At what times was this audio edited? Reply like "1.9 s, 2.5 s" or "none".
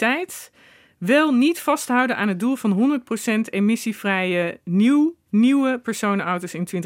none